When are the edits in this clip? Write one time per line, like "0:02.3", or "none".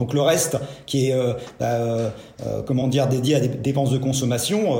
none